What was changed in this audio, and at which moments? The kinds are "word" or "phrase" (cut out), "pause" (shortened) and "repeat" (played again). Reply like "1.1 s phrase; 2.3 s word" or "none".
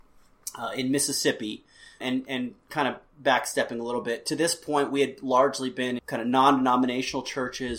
2.0 s word; 6.0 s word